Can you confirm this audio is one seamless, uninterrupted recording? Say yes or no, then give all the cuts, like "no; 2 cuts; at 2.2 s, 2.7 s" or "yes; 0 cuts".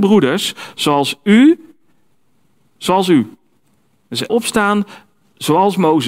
no; 1 cut; at 4.3 s